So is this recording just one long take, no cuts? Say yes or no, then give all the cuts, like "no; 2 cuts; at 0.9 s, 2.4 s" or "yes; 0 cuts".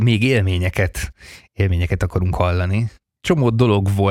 yes; 0 cuts